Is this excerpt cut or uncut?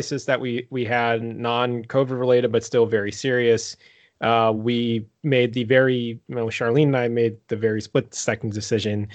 uncut